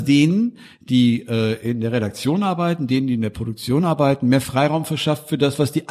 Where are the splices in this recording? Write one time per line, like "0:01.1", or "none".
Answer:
none